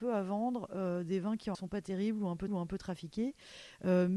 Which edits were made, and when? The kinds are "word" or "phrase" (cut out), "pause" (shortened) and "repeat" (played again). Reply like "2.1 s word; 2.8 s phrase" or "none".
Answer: 1.5 s word; 2.5 s repeat